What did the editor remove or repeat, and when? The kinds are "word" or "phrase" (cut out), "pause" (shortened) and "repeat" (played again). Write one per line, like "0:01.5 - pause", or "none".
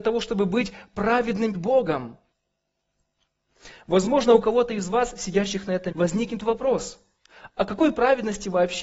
0:01.5 - word
0:05.9 - word